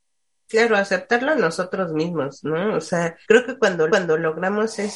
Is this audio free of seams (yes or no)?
no